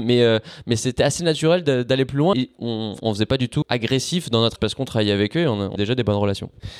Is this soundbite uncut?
no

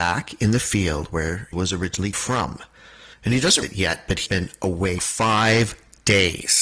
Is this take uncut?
no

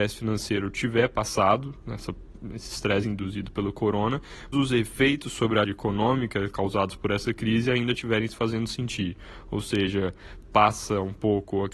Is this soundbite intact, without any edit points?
no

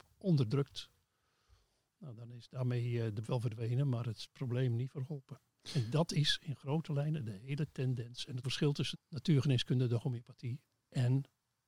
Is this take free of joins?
no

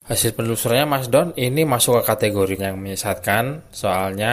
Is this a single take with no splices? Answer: no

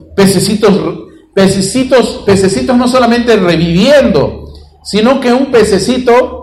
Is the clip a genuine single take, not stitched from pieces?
yes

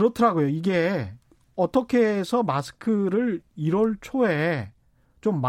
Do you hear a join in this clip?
yes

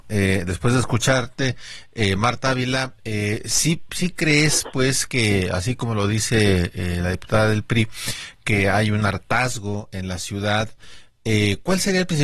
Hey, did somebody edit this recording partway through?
no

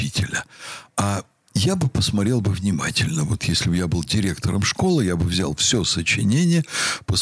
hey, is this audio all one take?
yes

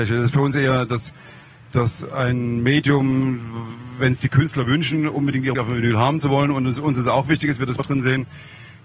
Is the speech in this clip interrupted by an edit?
yes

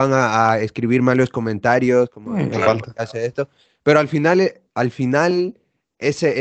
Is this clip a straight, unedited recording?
yes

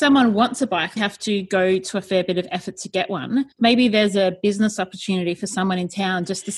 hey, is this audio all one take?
no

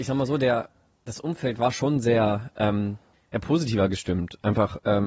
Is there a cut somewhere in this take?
yes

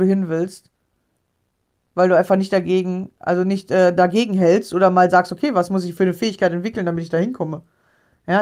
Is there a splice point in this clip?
no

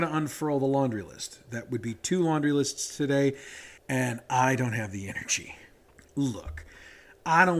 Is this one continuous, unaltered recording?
no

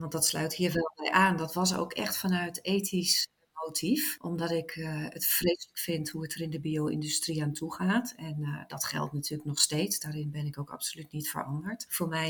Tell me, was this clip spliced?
no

